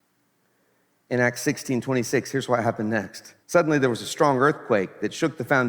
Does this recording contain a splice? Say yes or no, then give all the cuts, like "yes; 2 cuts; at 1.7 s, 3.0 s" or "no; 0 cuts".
yes; 1 cut; at 3.4 s